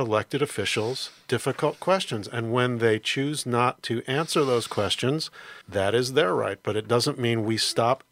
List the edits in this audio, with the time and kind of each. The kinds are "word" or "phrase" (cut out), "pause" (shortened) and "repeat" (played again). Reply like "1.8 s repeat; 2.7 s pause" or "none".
5.6 s pause

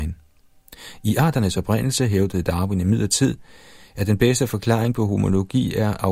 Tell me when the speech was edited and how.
none

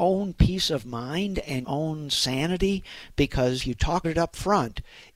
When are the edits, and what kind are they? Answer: 1.6 s word; 3.6 s word; 4.0 s word

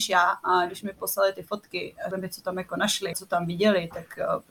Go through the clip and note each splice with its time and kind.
2.1 s word; 3.1 s word

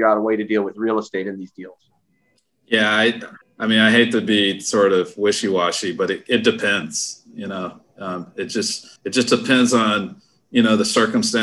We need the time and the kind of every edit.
3.4 s pause; 9.0 s pause

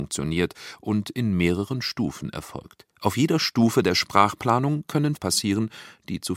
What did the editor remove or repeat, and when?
2.9 s pause; 5.2 s word

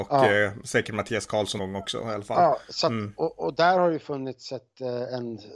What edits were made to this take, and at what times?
1.6 s word

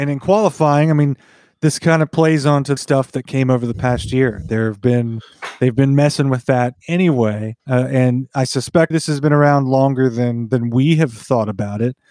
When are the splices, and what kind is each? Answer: 2.8 s phrase; 7.6 s pause; 8.9 s word

